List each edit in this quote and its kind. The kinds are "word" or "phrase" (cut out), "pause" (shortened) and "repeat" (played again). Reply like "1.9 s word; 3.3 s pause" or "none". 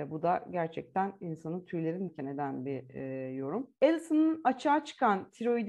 2.1 s word; 3.8 s pause